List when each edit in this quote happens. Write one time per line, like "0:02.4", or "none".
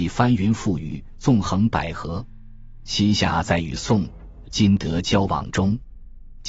0:04.4

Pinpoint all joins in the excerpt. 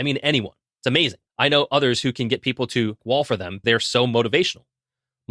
0:01.3
0:03.0
0:03.6

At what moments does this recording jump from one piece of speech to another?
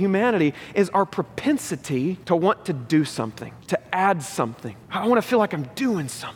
0:02.2
0:03.6
0:04.8

